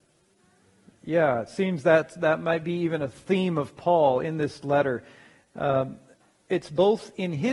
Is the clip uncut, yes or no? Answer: yes